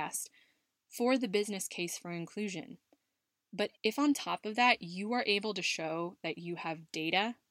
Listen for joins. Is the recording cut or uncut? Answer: cut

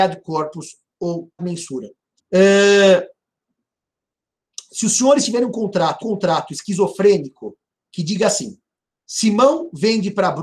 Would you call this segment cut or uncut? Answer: cut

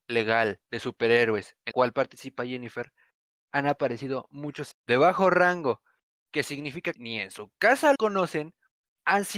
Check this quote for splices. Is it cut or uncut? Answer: cut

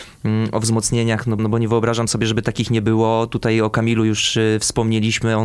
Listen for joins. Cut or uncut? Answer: cut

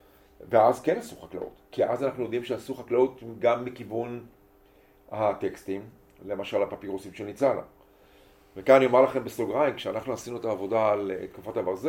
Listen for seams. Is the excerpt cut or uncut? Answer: uncut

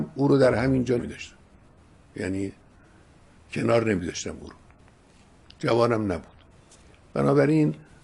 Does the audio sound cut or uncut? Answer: cut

